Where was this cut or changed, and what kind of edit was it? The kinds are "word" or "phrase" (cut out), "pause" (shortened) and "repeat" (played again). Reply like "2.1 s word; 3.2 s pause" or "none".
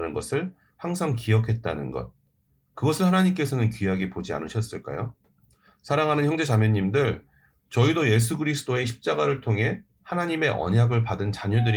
none